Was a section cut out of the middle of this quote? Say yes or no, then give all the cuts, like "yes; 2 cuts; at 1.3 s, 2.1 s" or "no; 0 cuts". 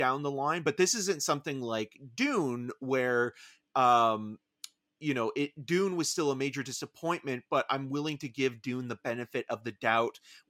no; 0 cuts